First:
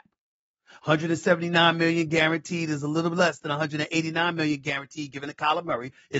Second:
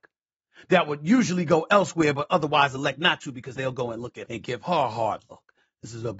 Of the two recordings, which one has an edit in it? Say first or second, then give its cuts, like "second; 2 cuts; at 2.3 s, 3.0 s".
second; 2 cuts; at 3.6 s, 4.3 s